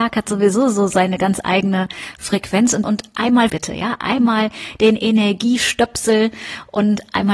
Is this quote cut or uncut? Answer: cut